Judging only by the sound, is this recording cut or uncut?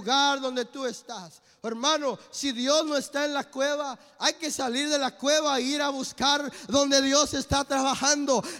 uncut